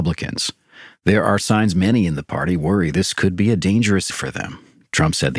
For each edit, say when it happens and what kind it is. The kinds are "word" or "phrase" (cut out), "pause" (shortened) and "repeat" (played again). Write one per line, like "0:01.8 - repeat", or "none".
0:04.1 - word